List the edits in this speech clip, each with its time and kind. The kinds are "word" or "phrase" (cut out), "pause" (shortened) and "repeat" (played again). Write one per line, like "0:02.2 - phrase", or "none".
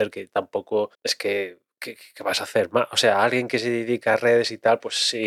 0:00.9 - pause